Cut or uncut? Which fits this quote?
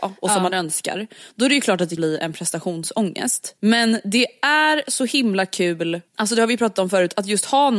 cut